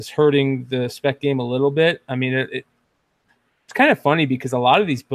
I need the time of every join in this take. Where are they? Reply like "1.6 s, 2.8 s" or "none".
none